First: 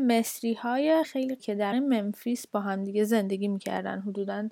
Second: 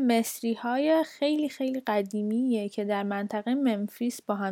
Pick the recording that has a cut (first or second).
first